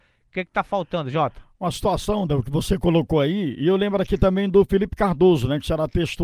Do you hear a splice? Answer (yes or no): no